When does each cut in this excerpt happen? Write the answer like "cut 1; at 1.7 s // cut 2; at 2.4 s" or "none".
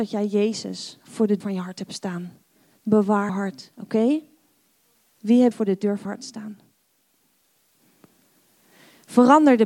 cut 1; at 1.4 s // cut 2; at 3.3 s // cut 3; at 5.5 s // cut 4; at 6.0 s